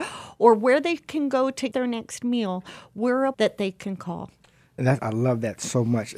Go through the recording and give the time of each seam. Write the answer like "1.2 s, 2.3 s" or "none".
1.7 s, 3.3 s, 5.0 s